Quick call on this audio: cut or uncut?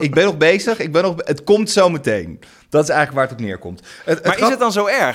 uncut